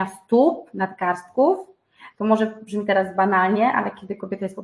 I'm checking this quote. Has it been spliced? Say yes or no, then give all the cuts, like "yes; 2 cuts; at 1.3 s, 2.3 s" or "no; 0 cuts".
no; 0 cuts